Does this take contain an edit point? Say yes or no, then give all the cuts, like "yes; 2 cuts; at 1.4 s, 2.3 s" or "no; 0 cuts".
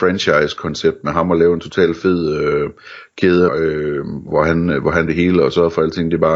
yes; 3 cuts; at 3.5 s, 4.3 s, 5.1 s